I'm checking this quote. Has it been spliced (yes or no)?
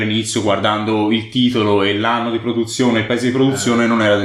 no